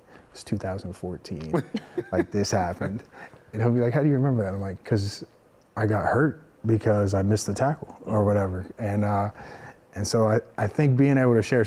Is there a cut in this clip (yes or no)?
no